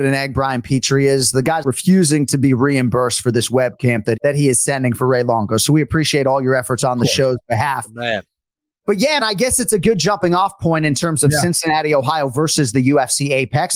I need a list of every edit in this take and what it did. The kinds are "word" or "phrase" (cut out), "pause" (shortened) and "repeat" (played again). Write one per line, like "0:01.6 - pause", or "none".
0:01.6 - word
0:04.2 - phrase
0:09.2 - word